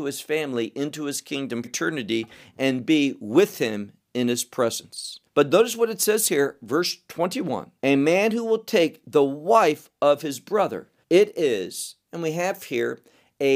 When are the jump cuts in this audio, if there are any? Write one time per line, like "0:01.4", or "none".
0:01.6
0:05.3
0:07.8
0:11.0